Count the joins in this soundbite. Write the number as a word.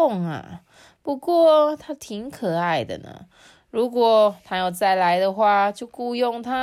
zero